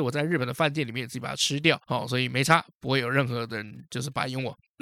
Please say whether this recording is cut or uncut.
cut